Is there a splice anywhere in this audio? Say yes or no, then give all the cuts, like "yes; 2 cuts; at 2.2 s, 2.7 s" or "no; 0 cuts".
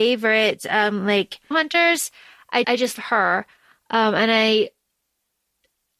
yes; 3 cuts; at 1.5 s, 2.6 s, 2.9 s